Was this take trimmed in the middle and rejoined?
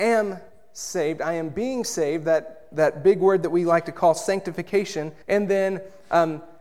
yes; 1 cut; at 5.2 s

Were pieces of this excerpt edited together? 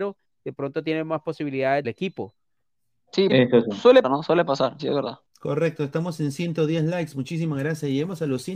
yes; 5 cuts; at 1.8 s, 3.3 s, 4.0 s, 4.8 s, 5.3 s

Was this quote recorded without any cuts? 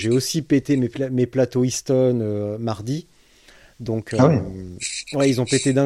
yes; 0 cuts

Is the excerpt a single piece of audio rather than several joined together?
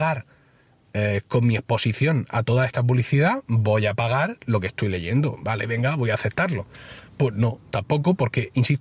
yes; 0 cuts

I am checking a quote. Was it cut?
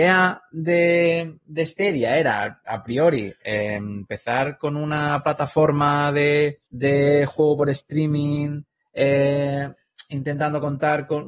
yes; 1 cut; at 6.6 s

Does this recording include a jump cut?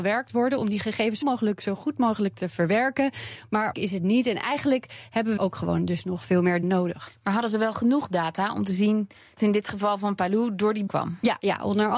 yes; 6 cuts; at 1.2 s, 3.7 s, 5.4 s, 6.6 s, 9.4 s, 10.9 s

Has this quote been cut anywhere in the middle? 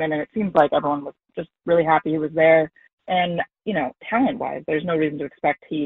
yes; 1 cut; at 2.9 s

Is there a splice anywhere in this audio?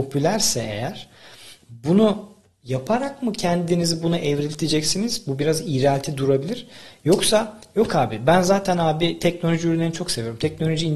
no; 0 cuts

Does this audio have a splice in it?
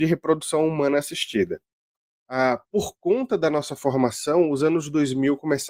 no; 0 cuts

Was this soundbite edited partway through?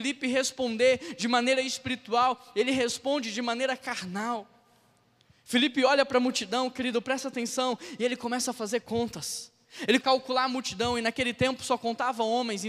yes; 1 cut; at 10.0 s

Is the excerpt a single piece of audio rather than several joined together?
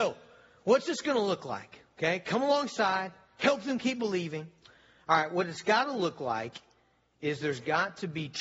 yes; 0 cuts

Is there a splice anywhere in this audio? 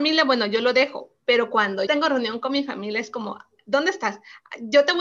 yes; 1 cut; at 1.9 s

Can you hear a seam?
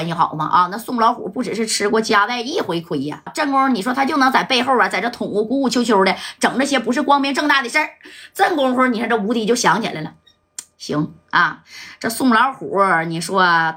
yes; 1 cut; at 3.3 s

